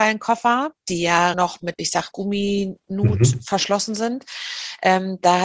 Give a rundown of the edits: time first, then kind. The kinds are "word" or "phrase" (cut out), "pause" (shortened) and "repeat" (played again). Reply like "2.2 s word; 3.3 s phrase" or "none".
1.3 s word; 1.7 s word; 2.1 s word